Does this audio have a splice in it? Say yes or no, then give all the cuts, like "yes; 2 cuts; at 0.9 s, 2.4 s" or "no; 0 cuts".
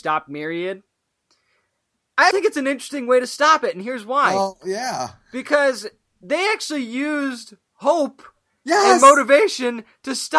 yes; 1 cut; at 2.3 s